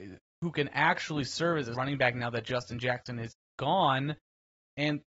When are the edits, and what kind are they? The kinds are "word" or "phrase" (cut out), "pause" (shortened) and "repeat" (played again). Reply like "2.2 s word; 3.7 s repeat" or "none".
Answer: 1.7 s word